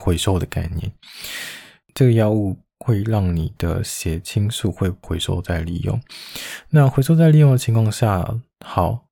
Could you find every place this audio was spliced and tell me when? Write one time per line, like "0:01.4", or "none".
none